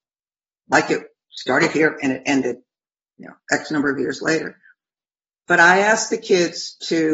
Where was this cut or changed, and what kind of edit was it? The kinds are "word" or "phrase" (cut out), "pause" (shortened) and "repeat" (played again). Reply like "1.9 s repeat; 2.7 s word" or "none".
none